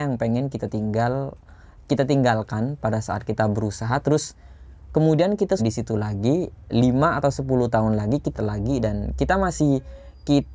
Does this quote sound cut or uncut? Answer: cut